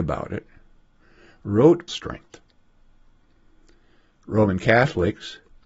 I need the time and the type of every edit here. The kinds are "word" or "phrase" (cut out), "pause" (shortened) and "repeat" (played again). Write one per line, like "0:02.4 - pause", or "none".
0:01.9 - phrase